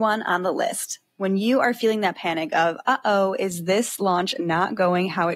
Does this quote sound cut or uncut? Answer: uncut